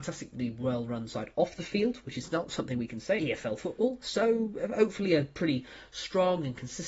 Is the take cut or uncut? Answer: cut